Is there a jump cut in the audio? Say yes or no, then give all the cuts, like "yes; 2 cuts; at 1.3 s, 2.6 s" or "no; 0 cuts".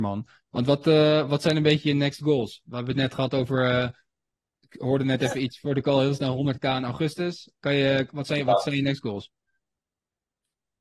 no; 0 cuts